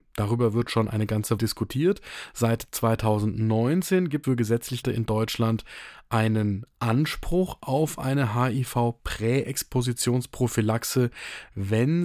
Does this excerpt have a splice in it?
yes; 3 cuts; at 1.4 s, 4.2 s, 4.8 s

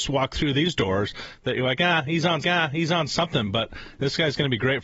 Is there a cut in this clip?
yes; 1 cut; at 2.4 s

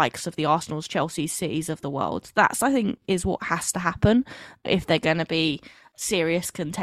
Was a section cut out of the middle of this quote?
no; 0 cuts

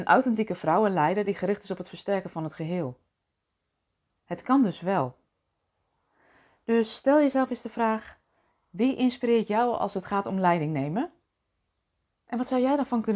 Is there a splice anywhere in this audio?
no; 0 cuts

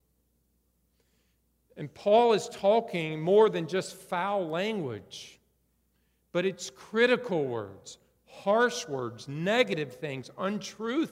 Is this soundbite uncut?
yes; 0 cuts

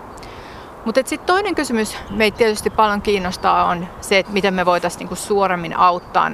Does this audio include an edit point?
yes; 2 cuts; at 2.1 s, 4.2 s

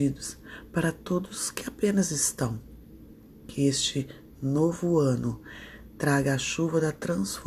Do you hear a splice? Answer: no; 0 cuts

